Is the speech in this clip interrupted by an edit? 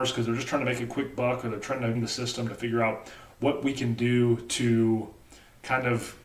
yes; 1 cut; at 1.9 s

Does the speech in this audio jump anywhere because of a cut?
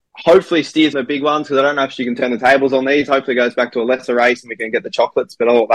yes; 1 cut; at 0.9 s

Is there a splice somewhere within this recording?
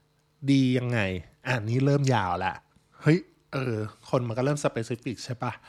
no; 0 cuts

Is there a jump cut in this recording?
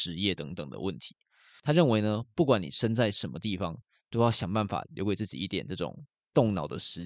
no; 0 cuts

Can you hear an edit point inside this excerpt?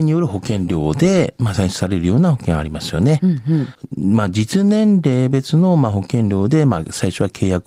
no; 0 cuts

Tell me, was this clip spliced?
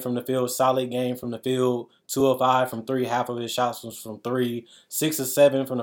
no; 0 cuts

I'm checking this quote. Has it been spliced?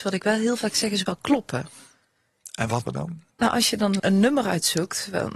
yes; 4 cuts; at 1.1 s, 2.8 s, 3.3 s, 4.0 s

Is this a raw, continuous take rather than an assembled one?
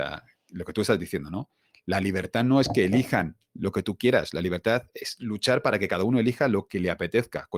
yes; 0 cuts

